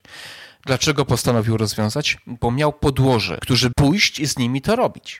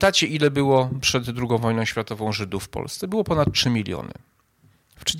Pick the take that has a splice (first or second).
first